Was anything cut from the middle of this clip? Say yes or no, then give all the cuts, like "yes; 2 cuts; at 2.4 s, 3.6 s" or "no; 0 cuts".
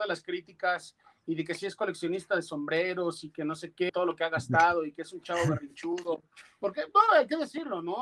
yes; 1 cut; at 3.9 s